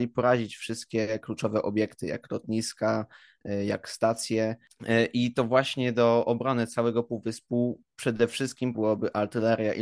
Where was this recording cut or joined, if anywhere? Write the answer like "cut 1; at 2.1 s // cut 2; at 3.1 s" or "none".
cut 1; at 8.7 s